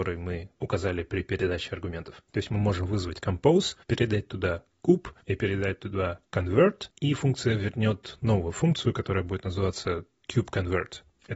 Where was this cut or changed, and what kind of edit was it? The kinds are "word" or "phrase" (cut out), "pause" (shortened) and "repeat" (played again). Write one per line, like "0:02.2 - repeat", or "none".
0:03.8 - pause
0:05.2 - pause